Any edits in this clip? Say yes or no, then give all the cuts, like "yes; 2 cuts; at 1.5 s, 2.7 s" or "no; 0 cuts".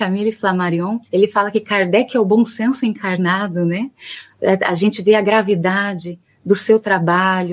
yes; 1 cut; at 1.0 s